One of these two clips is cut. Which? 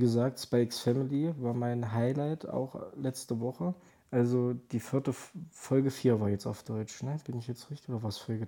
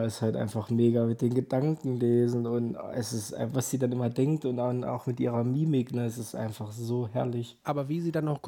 first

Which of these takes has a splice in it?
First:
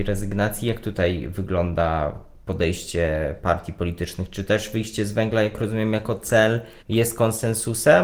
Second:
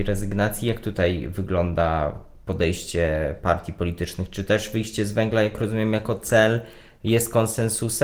first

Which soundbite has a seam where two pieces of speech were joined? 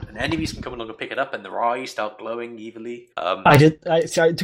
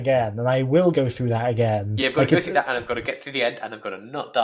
first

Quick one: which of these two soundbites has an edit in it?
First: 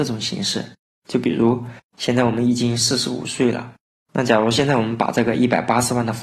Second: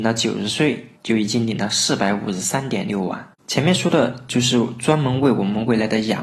second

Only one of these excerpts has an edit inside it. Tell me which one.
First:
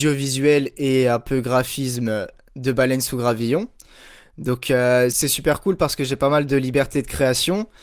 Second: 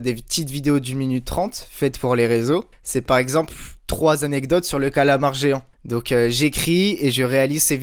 second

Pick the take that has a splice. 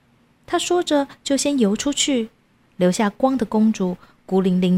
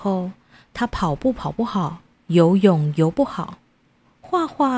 second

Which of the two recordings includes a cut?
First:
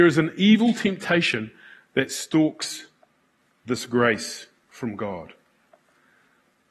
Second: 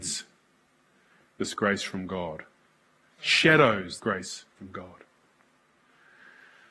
second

